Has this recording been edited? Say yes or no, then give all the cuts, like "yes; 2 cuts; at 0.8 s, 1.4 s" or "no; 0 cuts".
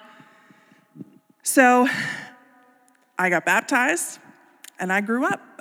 no; 0 cuts